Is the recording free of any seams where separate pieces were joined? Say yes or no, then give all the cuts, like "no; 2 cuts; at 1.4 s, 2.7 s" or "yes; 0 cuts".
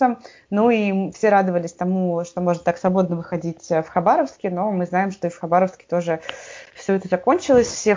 yes; 0 cuts